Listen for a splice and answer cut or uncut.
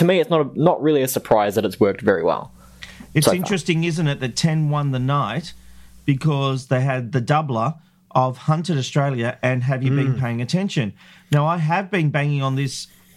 uncut